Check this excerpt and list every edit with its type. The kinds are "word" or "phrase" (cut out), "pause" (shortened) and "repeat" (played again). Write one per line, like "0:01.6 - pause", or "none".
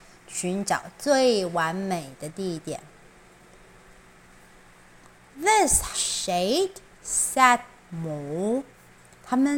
0:05.9 - word